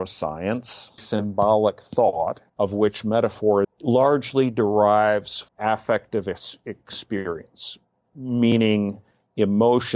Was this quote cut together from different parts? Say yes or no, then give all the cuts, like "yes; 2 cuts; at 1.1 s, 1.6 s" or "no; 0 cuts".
yes; 4 cuts; at 1.0 s, 2.5 s, 3.6 s, 5.5 s